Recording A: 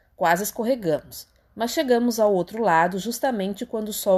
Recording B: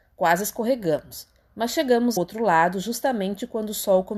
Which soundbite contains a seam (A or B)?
B